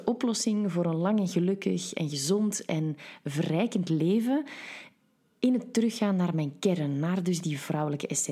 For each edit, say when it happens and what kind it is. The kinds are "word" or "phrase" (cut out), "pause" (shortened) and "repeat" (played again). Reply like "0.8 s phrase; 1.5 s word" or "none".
none